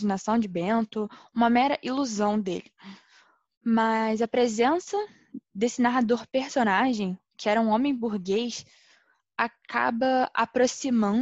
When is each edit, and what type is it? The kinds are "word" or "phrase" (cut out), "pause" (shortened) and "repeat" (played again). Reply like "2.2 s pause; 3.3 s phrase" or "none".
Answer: none

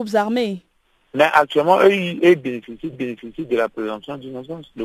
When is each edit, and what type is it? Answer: 2.9 s repeat

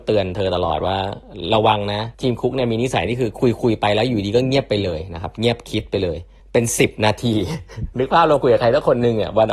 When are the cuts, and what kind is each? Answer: 2.1 s pause; 6.4 s pause

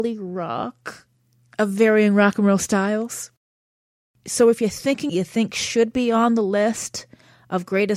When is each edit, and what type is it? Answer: 5.1 s phrase

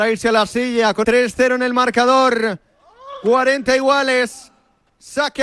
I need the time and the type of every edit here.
1.0 s word

